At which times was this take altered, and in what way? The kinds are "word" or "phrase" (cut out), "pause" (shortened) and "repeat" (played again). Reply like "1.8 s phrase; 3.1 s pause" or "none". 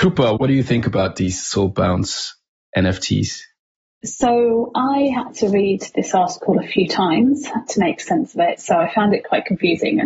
none